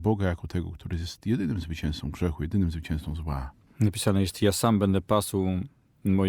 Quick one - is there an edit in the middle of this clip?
no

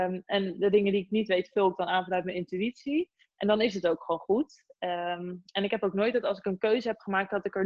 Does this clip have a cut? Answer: no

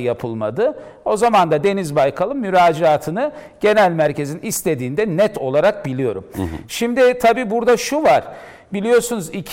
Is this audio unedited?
yes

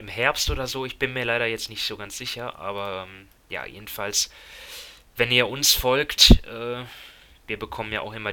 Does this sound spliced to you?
yes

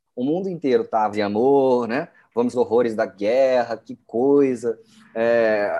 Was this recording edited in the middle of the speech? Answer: yes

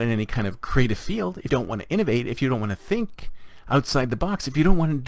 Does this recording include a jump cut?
yes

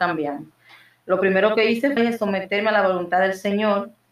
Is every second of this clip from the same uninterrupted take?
no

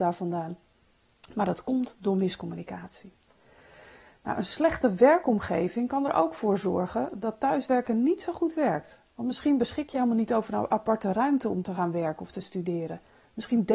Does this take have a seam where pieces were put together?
yes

